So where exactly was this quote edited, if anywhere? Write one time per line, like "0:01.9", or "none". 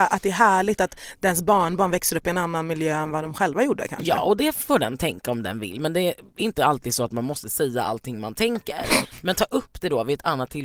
none